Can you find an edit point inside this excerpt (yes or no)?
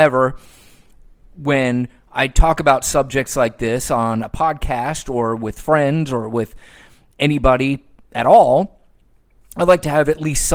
no